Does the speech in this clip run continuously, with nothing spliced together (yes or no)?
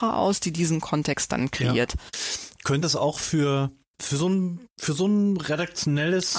no